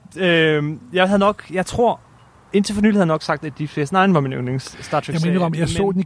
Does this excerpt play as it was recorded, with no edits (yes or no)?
yes